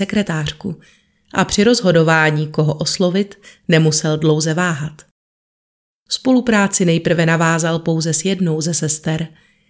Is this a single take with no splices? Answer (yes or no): yes